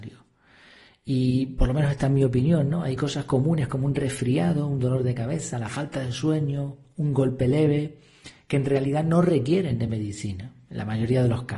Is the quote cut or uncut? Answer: uncut